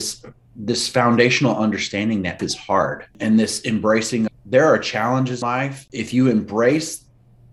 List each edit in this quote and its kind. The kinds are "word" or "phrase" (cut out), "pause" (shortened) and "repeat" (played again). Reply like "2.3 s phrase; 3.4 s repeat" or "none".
2.4 s word; 4.3 s word; 5.4 s word